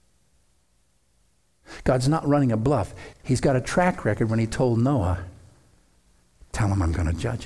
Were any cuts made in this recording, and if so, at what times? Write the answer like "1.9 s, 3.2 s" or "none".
3.1 s